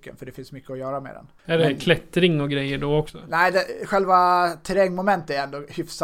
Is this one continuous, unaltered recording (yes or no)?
no